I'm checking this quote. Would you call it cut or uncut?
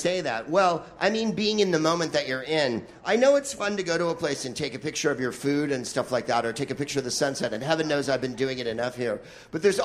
uncut